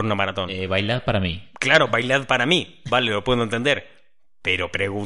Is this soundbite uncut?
yes; 0 cuts

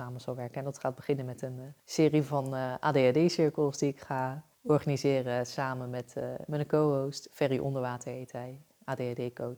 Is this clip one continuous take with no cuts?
no; 2 cuts; at 1.8 s, 4.5 s

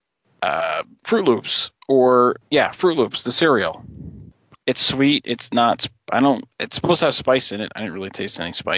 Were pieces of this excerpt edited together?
no; 0 cuts

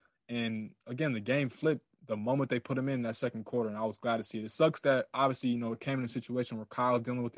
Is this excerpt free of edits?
yes; 0 cuts

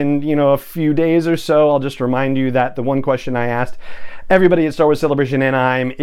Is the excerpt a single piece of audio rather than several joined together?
yes; 0 cuts

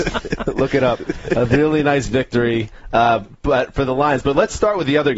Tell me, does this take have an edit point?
no; 0 cuts

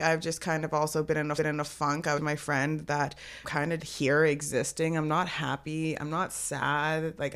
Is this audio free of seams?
no; 4 cuts; at 1.4 s, 2.2 s, 3.4 s, 3.8 s

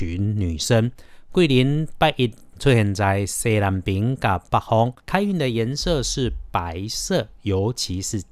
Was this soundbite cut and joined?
yes; 1 cut; at 5.0 s

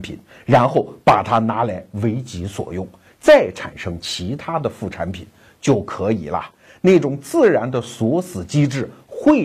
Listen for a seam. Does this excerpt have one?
no; 0 cuts

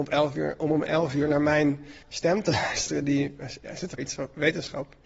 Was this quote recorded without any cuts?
no; 2 cuts; at 2.0 s, 4.0 s

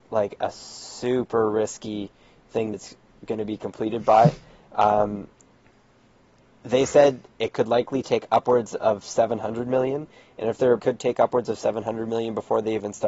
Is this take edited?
yes; 2 cuts; at 2.7 s, 10.8 s

